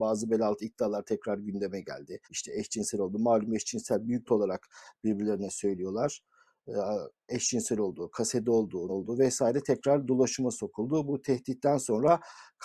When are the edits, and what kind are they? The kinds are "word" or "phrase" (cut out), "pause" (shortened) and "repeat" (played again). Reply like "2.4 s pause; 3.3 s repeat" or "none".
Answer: 2.2 s pause; 4.3 s phrase; 8.9 s word